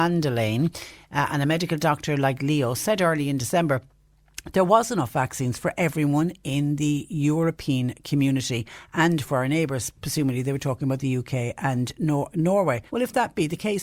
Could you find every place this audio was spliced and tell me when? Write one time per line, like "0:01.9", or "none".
0:12.9